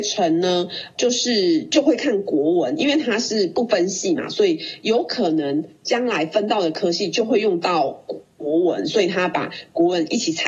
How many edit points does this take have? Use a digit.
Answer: 1